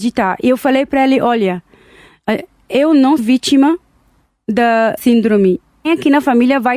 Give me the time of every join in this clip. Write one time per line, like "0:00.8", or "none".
0:03.2
0:05.0
0:05.8